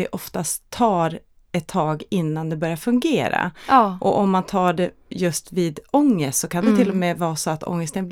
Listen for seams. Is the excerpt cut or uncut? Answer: uncut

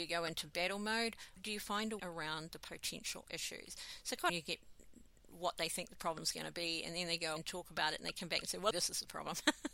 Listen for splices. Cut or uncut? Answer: cut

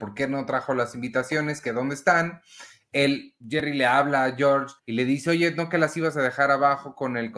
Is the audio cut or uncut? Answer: cut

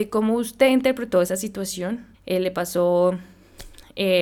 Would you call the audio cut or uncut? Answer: cut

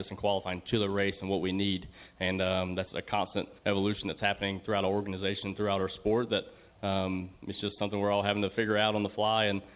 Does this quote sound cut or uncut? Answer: cut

